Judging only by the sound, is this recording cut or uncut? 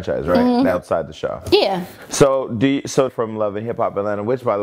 cut